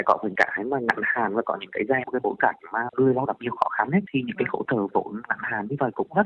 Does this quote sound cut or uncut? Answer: cut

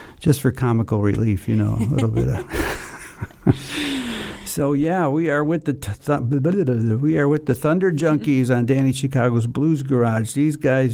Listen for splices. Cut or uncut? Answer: uncut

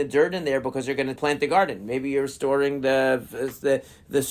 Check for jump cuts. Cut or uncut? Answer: cut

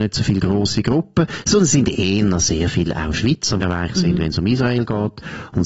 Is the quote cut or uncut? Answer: cut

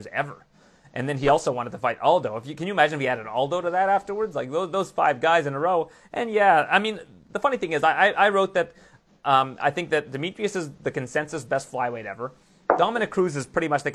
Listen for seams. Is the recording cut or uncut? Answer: uncut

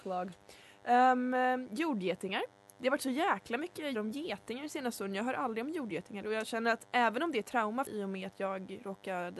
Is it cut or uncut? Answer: cut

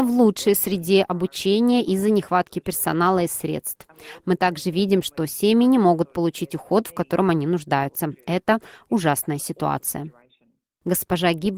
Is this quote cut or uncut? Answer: uncut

